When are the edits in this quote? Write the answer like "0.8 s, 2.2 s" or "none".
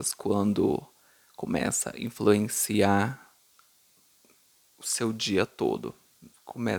none